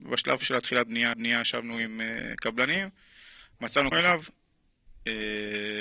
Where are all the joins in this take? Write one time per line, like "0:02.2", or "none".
0:01.1
0:03.9